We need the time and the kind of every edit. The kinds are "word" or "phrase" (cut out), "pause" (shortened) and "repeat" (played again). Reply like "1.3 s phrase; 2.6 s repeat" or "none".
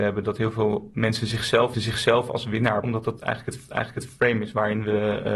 1.7 s repeat; 2.8 s word; 3.7 s repeat